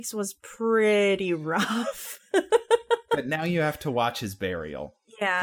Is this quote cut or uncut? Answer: uncut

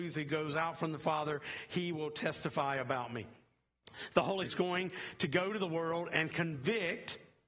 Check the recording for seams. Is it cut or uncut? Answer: cut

